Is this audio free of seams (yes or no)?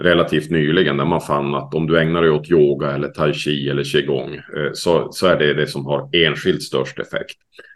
yes